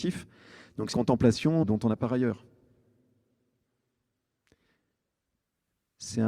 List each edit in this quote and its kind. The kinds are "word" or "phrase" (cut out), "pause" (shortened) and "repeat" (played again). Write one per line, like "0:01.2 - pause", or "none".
0:00.9 - word
0:01.6 - word
0:02.0 - word

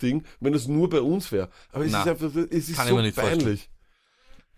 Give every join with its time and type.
none

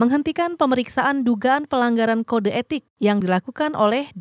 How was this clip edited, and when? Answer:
none

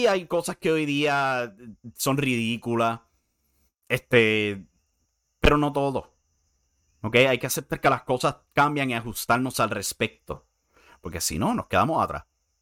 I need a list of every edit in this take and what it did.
none

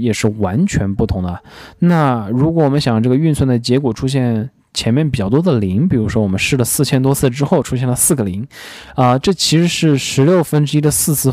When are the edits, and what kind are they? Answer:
none

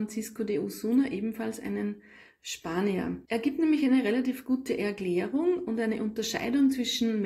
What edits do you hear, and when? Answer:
0:03.2 - pause

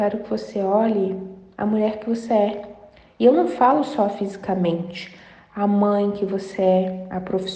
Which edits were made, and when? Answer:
none

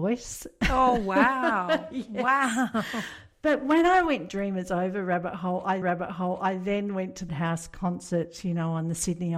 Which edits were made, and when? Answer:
0:04.3 - phrase
0:05.8 - repeat
0:07.3 - phrase

